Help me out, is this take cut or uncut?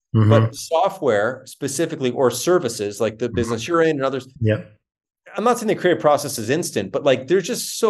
uncut